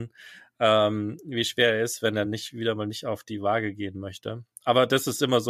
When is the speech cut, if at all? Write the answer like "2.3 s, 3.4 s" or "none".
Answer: none